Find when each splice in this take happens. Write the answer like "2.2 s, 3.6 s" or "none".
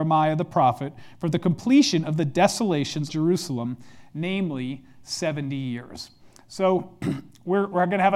3.1 s